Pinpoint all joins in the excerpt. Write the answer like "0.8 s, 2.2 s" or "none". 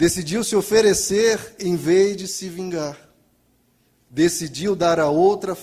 none